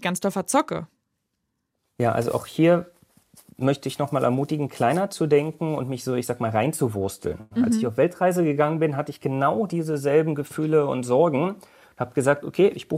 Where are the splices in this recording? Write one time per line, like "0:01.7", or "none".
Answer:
none